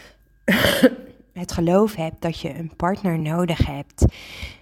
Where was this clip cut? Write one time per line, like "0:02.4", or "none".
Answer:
none